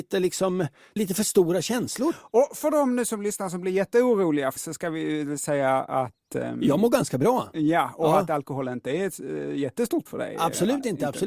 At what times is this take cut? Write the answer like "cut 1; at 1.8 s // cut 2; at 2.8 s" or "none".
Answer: cut 1; at 1.0 s // cut 2; at 4.6 s // cut 3; at 9.2 s // cut 4; at 10.1 s